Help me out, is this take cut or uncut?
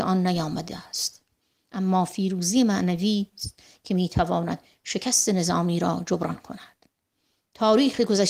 uncut